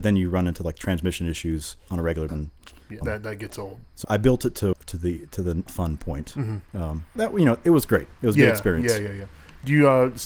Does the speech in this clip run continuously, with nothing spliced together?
no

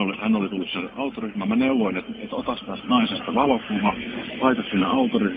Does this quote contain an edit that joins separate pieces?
no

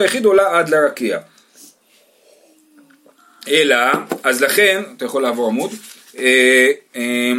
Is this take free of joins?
yes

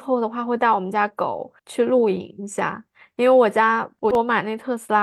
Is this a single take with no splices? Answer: no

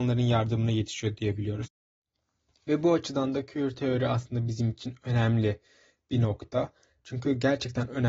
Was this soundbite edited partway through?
no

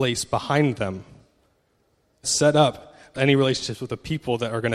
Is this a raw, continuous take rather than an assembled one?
no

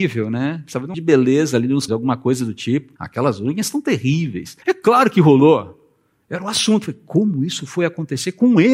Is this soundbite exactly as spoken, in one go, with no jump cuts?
no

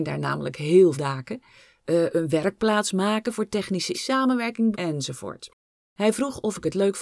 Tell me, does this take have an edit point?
yes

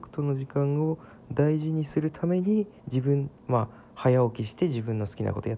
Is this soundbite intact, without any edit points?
no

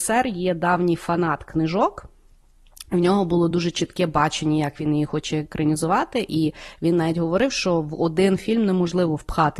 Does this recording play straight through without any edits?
yes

